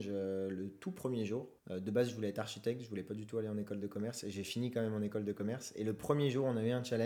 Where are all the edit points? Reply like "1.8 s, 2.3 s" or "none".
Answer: 1.6 s